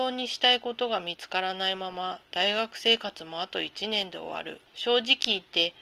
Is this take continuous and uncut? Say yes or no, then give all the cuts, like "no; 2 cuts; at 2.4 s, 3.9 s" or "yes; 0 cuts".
no; 1 cut; at 4.7 s